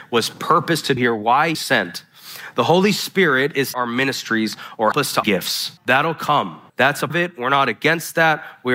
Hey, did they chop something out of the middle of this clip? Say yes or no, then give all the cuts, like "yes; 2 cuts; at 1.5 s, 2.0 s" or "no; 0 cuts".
yes; 8 cuts; at 1.0 s, 1.5 s, 3.7 s, 4.9 s, 5.2 s, 5.8 s, 6.7 s, 7.1 s